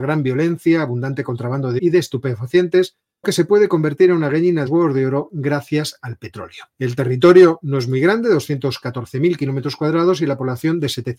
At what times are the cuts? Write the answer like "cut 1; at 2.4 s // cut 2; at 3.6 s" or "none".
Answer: cut 1; at 1.8 s // cut 2; at 3.2 s // cut 3; at 4.7 s // cut 4; at 6.7 s